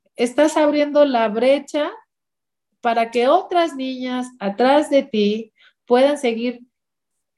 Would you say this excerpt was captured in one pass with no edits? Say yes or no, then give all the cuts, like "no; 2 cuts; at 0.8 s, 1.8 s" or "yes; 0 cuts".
yes; 0 cuts